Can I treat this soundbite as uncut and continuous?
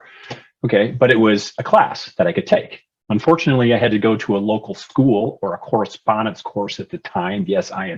yes; 0 cuts

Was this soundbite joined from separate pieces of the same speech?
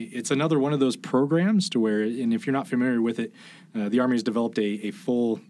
no; 0 cuts

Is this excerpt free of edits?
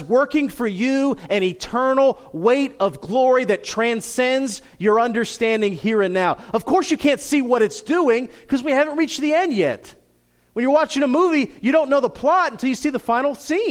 yes; 0 cuts

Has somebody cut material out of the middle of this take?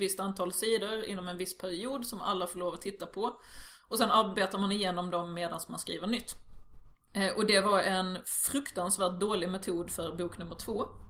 no; 0 cuts

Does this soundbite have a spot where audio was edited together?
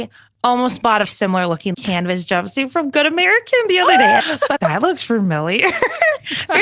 yes; 4 cuts; at 1.0 s, 1.7 s, 4.2 s, 4.6 s

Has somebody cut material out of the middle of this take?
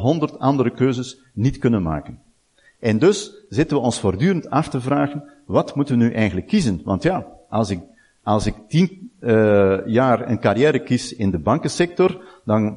no; 0 cuts

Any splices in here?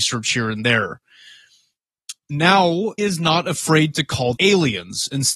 yes; 2 cuts; at 3.0 s, 4.4 s

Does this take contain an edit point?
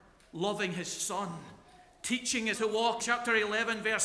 yes; 2 cuts; at 2.5 s, 3.0 s

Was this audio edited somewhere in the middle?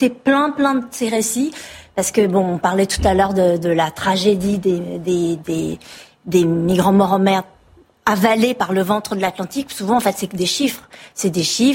no; 0 cuts

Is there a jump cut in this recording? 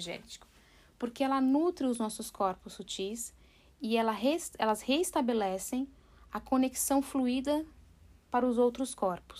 no; 0 cuts

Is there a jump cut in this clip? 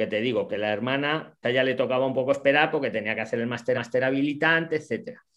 yes; 2 cuts; at 1.4 s, 3.7 s

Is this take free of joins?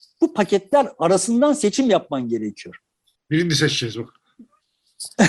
yes; 0 cuts

